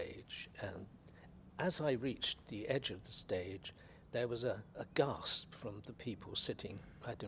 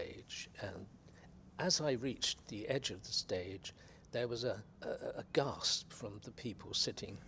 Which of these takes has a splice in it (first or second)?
first